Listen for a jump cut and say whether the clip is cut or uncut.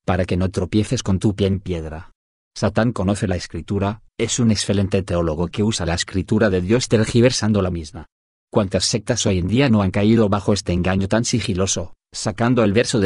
uncut